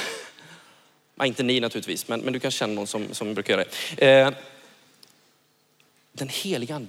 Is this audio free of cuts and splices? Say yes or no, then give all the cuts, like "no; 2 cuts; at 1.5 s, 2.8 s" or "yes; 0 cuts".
yes; 0 cuts